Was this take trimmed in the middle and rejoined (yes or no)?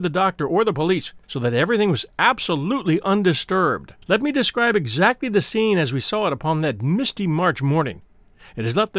yes